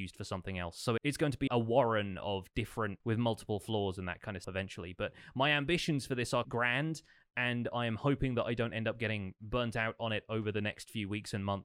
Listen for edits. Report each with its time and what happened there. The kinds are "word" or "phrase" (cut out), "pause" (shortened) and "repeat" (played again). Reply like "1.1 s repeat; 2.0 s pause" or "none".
1.0 s word; 1.5 s word; 3.0 s word; 4.4 s word; 6.4 s word